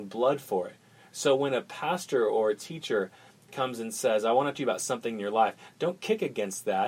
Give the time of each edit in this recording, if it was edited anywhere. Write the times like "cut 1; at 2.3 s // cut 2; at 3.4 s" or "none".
cut 1; at 4.5 s